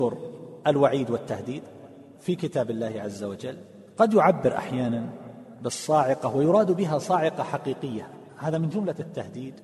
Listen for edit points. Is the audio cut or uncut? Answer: uncut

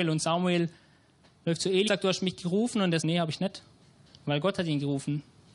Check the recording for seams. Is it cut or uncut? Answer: cut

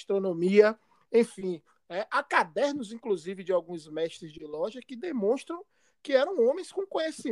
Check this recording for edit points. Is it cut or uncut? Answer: uncut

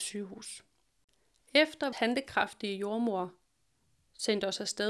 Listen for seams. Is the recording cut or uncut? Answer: cut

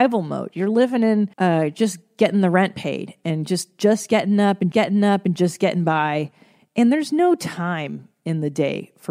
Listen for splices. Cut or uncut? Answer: cut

